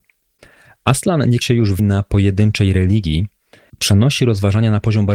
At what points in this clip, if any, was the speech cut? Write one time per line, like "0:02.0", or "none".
0:01.4
0:01.8
0:03.7